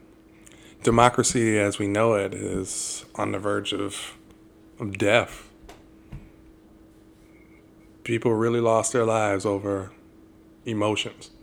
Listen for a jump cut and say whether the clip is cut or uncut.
uncut